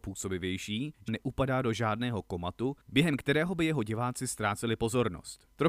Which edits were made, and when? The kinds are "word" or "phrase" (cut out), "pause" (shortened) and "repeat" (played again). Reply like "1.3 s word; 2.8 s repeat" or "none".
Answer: 1.1 s phrase; 2.8 s pause